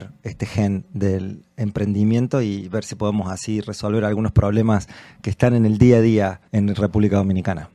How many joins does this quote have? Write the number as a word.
one